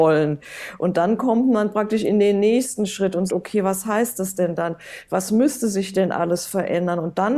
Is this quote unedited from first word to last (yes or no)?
no